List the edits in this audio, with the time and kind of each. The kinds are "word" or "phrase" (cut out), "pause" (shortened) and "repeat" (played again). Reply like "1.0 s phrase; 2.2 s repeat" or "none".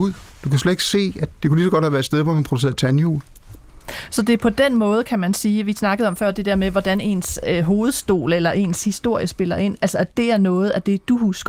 1.3 s word